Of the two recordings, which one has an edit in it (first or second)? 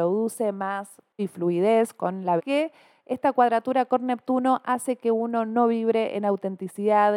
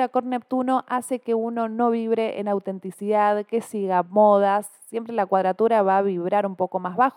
first